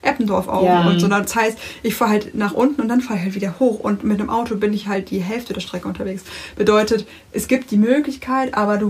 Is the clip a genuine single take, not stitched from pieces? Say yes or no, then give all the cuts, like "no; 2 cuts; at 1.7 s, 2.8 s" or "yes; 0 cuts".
yes; 0 cuts